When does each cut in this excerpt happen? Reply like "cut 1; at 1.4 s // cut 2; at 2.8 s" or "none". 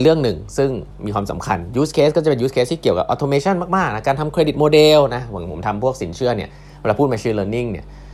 none